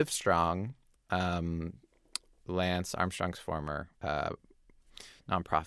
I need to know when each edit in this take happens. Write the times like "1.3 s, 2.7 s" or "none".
3.9 s